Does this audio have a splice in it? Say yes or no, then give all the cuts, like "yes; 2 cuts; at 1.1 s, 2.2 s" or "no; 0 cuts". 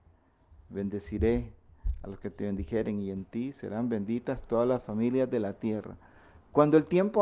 no; 0 cuts